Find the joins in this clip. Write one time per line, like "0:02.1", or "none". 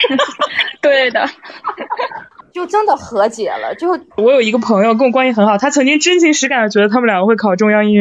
0:04.1